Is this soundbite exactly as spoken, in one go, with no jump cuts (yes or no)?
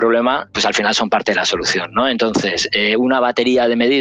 yes